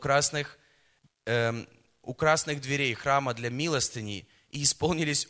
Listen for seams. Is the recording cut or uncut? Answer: uncut